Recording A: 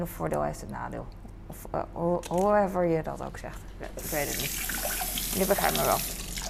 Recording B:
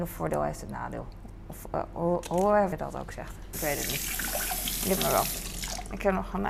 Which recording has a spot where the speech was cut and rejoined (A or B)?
B